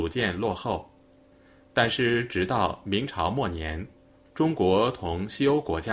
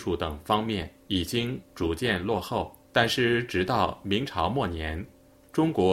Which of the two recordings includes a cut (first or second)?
second